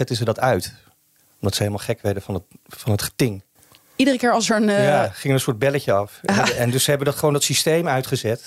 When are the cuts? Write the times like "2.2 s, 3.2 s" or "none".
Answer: 3.6 s